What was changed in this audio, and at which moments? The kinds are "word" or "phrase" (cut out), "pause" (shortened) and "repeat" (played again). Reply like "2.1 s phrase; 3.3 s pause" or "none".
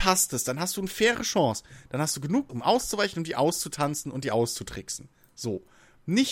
2.5 s word